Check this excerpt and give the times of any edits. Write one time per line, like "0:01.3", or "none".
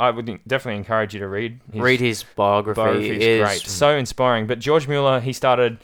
0:01.7
0:02.3
0:03.7